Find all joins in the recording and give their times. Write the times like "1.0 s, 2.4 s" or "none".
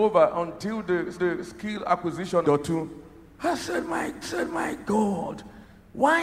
1.1 s, 2.4 s, 4.2 s

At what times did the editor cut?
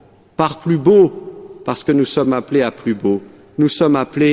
none

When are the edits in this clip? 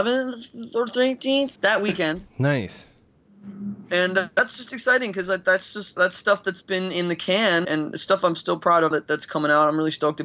1.6 s, 2.3 s, 4.3 s, 6.0 s, 7.6 s, 8.9 s

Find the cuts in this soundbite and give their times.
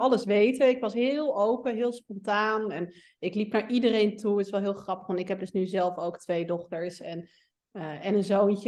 none

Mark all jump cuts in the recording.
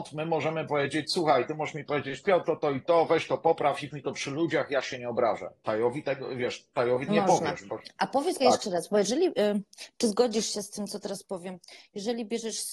2.4 s, 3.9 s, 7.1 s, 8.4 s

